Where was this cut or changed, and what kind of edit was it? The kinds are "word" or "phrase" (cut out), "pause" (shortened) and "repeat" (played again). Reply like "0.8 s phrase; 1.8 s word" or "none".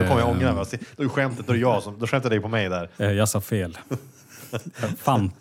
2.9 s pause

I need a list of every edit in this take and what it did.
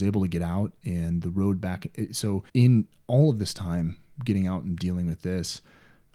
2.5 s pause

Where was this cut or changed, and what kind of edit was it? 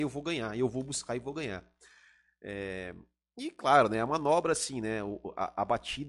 none

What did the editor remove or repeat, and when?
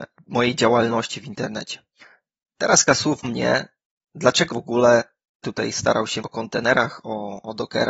2.9 s word; 3.2 s word; 4.5 s word; 5.4 s word; 6.2 s word

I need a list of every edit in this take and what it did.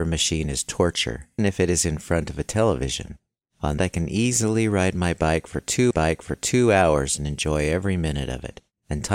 1.4 s word; 3.8 s phrase; 5.9 s repeat

